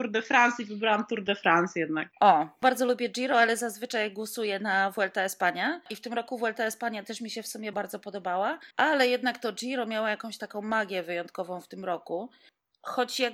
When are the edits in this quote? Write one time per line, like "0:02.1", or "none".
0:02.1
0:07.7
0:08.7